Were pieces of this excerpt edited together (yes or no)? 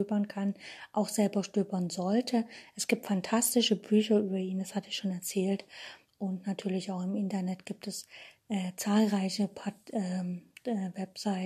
no